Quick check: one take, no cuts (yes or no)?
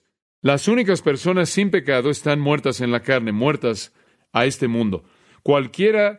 yes